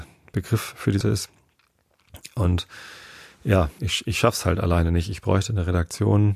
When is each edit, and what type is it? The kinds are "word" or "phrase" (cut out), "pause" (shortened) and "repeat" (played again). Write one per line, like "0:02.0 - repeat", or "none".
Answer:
0:01.0 - word
0:03.8 - word